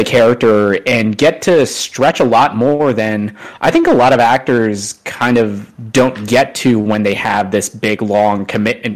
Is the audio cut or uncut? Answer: uncut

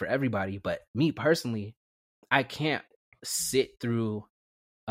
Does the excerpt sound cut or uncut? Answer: uncut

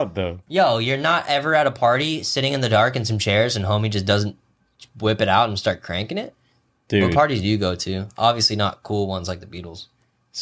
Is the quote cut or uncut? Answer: uncut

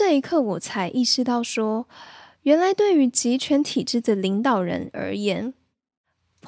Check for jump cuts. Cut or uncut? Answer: uncut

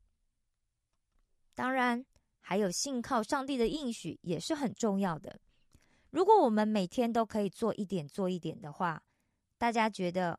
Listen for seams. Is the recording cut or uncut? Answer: uncut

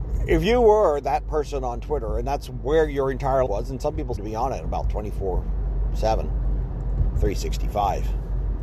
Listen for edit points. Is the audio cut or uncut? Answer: cut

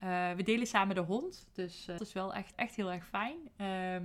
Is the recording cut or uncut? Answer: cut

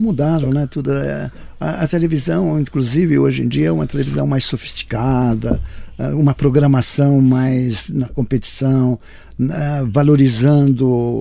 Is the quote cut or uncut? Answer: uncut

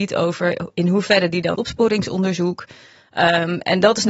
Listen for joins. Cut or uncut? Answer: cut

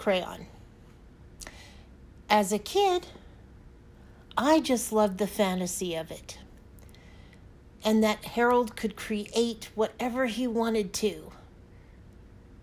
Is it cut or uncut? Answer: uncut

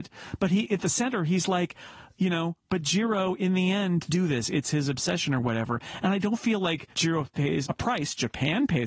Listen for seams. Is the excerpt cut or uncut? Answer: cut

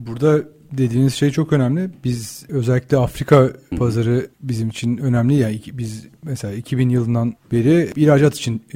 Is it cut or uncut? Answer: cut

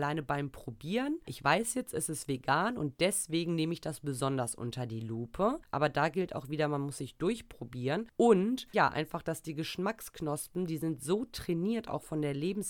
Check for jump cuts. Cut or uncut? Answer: uncut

